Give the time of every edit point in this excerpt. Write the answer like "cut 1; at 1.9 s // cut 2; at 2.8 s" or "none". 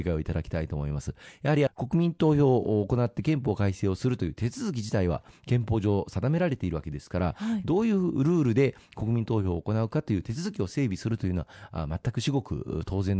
cut 1; at 1.7 s